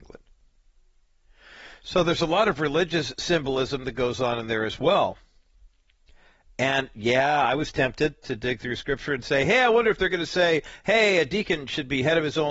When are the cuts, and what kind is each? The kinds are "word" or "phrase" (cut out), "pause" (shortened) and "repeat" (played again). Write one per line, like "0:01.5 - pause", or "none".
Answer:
none